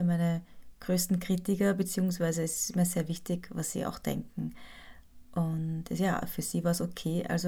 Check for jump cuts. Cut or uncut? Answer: uncut